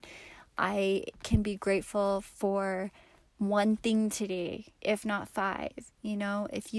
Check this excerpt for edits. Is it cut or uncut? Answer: uncut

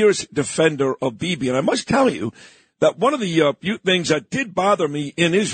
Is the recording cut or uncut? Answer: uncut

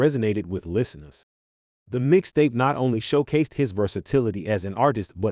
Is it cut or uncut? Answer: uncut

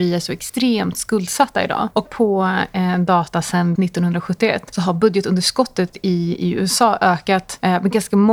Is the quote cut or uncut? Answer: cut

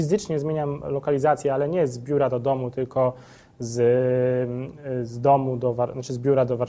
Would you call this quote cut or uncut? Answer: uncut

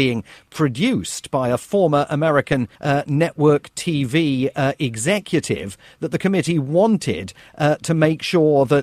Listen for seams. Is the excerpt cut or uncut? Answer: cut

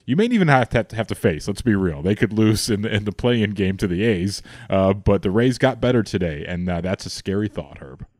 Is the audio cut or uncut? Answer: uncut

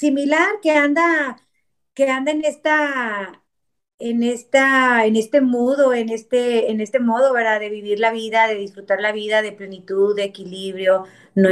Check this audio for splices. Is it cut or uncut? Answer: uncut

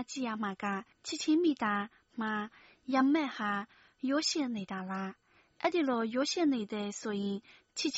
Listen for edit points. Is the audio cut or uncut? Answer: cut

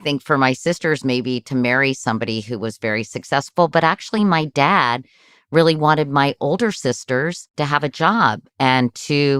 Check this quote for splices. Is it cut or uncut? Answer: uncut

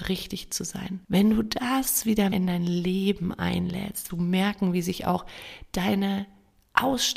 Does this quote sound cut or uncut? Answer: cut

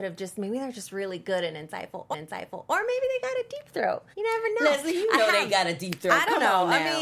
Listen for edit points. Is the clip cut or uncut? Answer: cut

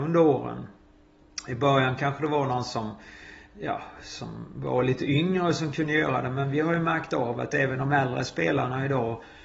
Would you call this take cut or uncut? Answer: uncut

